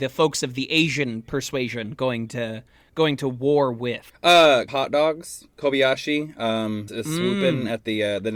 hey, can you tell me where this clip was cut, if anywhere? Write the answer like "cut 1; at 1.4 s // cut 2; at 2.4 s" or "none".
cut 1; at 4.7 s // cut 2; at 6.9 s